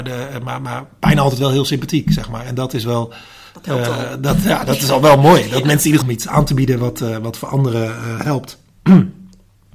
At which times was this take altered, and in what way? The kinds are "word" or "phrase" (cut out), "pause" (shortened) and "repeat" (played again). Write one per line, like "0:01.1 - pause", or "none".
0:06.0 - phrase